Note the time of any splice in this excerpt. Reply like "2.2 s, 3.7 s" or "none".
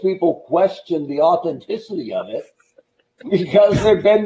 none